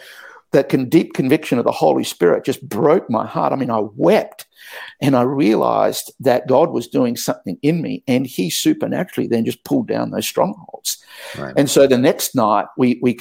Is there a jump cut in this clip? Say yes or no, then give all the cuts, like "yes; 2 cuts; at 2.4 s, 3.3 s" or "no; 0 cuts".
no; 0 cuts